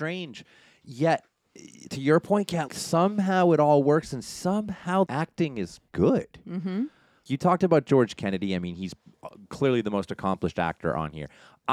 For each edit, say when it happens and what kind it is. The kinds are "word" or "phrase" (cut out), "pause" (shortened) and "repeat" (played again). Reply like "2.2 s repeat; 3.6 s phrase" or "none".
1.9 s word; 2.7 s word; 5.1 s word; 5.9 s word